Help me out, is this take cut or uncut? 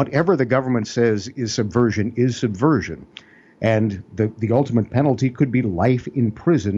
uncut